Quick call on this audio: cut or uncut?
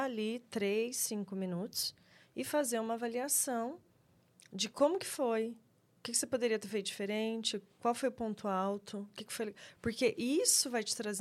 uncut